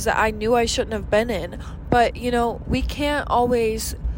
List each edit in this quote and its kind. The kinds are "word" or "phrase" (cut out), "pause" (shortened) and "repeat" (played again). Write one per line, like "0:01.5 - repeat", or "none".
none

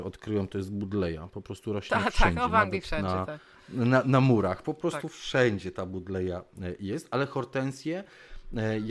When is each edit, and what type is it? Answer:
0:04.0 - word

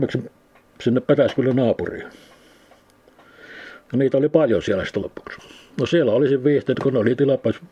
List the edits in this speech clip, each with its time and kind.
0:05.0 - word
0:06.7 - word

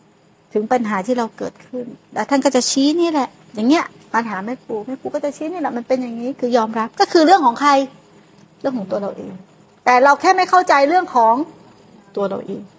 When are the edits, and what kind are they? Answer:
none

